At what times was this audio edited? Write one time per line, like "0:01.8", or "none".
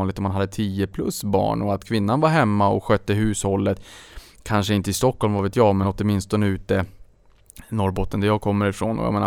none